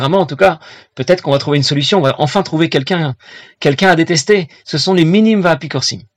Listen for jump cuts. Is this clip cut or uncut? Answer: uncut